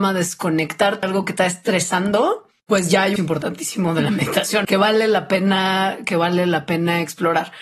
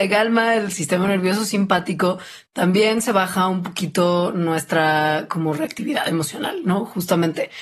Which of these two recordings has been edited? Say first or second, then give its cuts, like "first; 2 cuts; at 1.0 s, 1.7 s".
first; 5 cuts; at 1.0 s, 1.4 s, 2.6 s, 3.2 s, 4.6 s